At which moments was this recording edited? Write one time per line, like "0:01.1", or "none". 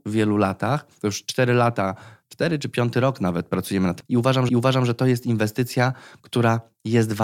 0:04.0
0:04.5